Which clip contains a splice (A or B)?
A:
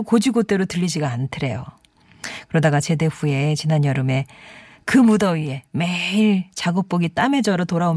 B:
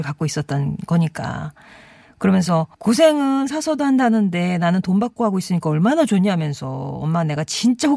B